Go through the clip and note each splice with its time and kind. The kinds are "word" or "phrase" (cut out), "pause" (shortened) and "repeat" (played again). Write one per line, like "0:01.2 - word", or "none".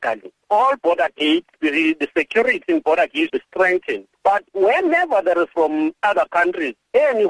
0:01.6 - word
0:03.3 - word
0:05.5 - word

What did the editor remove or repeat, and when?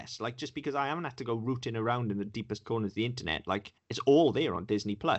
0:02.6 - word
0:03.8 - pause

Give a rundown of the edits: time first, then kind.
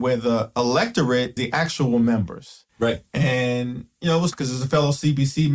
0:01.4 - word
0:02.7 - pause
0:04.3 - word

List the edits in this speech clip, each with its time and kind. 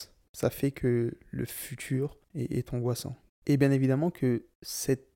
none

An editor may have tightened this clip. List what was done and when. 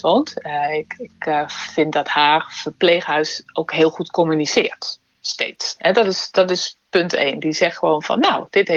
none

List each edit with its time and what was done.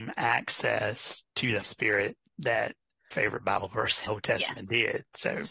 0:01.3 - pause
0:01.6 - word
0:03.1 - phrase
0:04.1 - phrase

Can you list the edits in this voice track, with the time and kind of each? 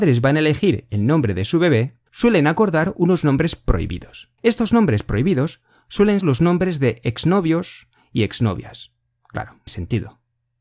0:02.1 - pause
0:04.4 - pause
0:06.2 - word
0:09.7 - word

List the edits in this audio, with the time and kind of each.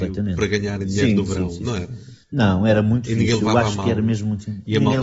0:02.2 - pause

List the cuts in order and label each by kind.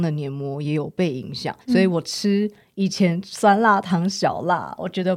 0:01.6 - pause

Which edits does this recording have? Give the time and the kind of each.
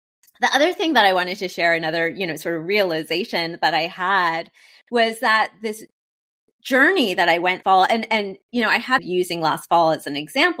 0:07.6 - phrase
0:08.4 - pause
0:09.0 - phrase

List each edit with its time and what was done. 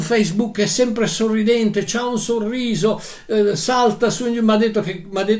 none

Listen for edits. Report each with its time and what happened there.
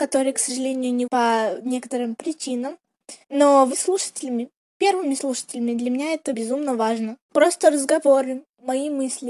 0:01.1 - word
0:03.2 - pause
0:03.7 - word
0:06.3 - word
0:07.2 - pause

